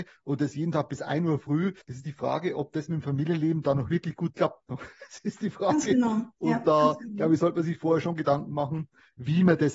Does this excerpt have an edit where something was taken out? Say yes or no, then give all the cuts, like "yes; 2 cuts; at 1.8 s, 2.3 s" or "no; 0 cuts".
yes; 2 cuts; at 1.8 s, 6.3 s